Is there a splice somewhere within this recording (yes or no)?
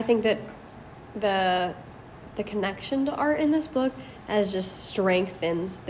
no